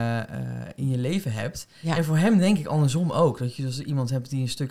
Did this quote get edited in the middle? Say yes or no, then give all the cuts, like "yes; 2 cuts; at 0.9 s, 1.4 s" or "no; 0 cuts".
no; 0 cuts